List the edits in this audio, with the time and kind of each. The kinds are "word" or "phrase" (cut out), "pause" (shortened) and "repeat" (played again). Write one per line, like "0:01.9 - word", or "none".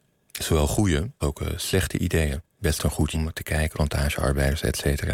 0:01.2 - word
0:03.1 - word
0:03.7 - word